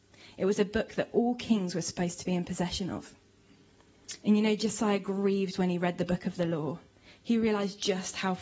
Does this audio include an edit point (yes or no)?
no